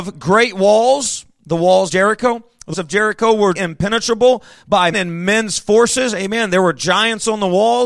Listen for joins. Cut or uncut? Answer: cut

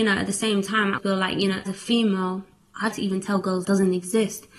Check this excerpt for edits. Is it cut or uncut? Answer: cut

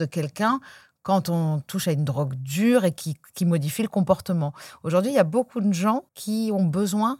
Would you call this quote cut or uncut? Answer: cut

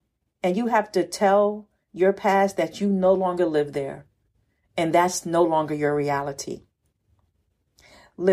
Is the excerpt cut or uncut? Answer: uncut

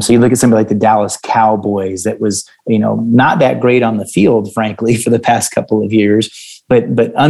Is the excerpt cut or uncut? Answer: uncut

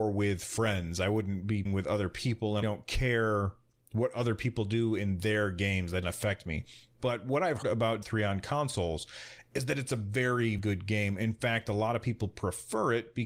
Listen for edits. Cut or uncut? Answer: cut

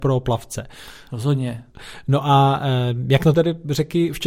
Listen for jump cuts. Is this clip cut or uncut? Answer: cut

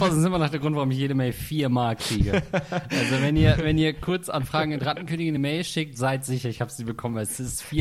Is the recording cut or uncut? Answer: uncut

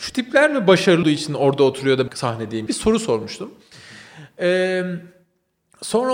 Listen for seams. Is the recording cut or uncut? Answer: cut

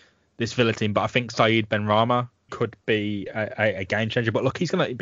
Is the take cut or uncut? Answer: cut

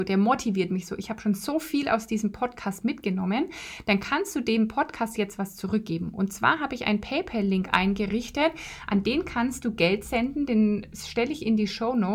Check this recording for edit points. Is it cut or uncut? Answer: uncut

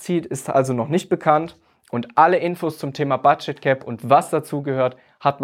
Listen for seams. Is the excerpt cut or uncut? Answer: uncut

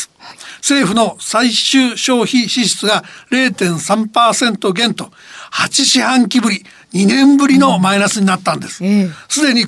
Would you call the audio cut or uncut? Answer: uncut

